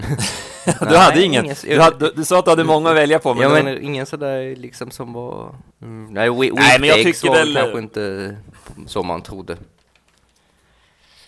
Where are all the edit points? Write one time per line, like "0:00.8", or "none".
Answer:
0:03.6
0:05.7
0:08.9